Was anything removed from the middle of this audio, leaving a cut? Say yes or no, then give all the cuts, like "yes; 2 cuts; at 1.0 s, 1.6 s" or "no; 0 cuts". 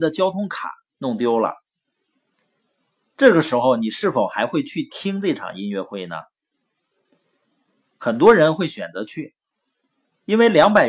no; 0 cuts